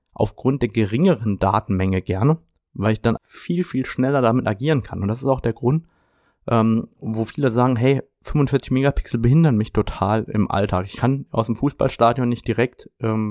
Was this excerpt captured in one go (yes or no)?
no